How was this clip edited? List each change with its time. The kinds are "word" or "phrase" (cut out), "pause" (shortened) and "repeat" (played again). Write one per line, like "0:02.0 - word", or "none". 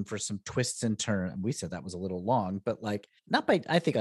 none